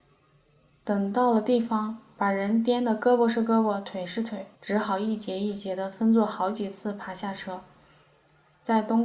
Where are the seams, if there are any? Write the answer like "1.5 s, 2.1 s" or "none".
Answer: 4.5 s